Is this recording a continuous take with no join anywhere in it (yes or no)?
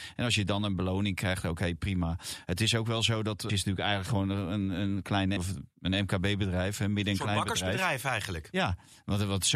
no